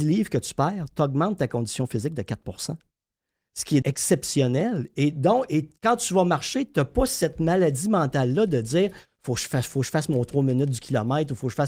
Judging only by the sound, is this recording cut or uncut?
cut